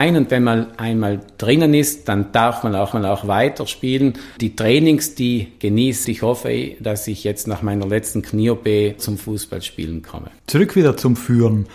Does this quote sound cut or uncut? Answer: cut